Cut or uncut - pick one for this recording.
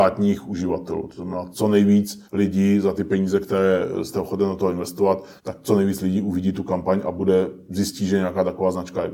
cut